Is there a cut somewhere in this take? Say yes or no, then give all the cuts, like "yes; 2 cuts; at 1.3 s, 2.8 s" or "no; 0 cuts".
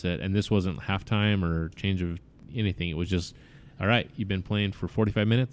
no; 0 cuts